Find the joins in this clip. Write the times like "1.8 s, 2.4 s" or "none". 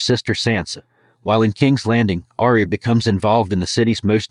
none